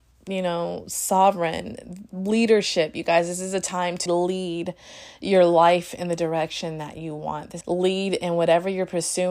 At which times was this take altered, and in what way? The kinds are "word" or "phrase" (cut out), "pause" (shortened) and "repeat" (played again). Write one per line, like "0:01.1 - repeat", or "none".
0:04.1 - word
0:07.6 - phrase